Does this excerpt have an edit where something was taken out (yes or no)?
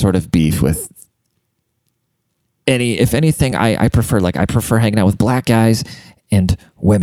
no